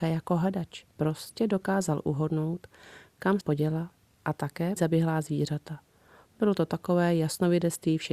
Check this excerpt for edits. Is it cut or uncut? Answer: cut